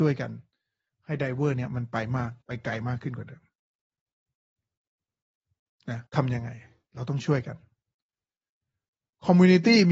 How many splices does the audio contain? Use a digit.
2